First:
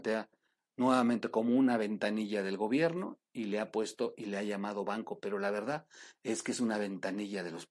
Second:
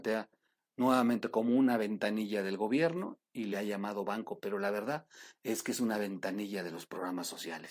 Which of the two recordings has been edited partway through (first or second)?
second